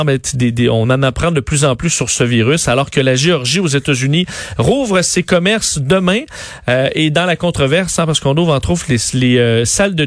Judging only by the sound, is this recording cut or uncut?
uncut